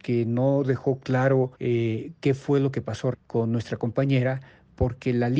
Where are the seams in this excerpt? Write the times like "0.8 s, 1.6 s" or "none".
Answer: 1.5 s, 3.1 s